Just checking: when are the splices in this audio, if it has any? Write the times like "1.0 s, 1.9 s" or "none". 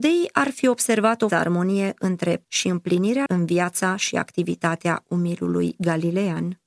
1.3 s, 2.4 s, 3.3 s